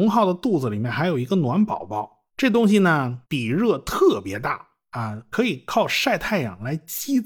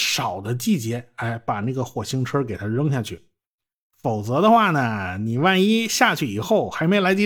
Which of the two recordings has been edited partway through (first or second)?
first